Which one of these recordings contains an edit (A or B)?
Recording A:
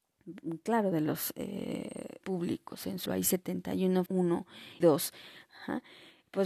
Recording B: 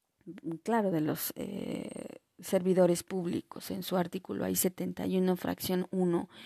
A